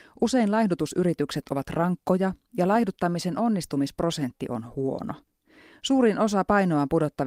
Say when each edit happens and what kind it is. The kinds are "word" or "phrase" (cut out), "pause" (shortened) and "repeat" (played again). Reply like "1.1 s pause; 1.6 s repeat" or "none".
none